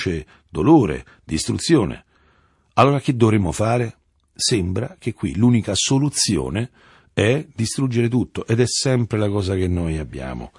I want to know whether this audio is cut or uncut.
uncut